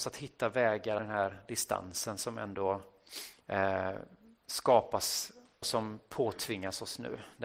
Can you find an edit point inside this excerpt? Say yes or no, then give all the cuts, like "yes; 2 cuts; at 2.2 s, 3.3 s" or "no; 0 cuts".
yes; 3 cuts; at 1.0 s, 3.4 s, 5.6 s